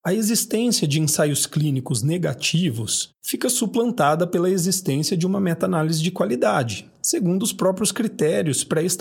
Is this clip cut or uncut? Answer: cut